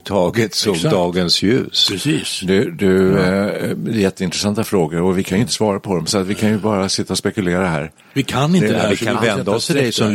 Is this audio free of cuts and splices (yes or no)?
yes